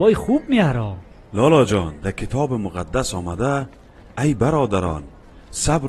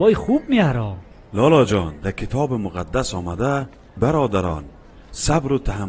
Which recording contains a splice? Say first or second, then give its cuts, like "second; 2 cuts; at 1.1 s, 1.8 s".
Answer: second; 1 cut; at 4.0 s